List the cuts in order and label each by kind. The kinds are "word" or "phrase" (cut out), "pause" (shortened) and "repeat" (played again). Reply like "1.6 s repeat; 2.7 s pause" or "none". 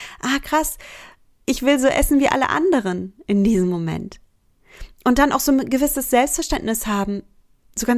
none